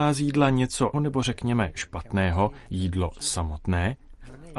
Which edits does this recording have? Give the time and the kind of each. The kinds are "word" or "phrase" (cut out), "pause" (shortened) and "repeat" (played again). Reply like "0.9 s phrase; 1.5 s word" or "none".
0.9 s word; 2.7 s word